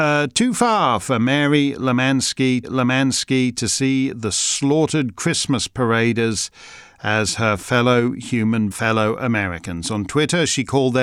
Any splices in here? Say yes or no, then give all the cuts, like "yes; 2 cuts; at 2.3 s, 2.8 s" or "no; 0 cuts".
yes; 2 cuts; at 2.6 s, 8.7 s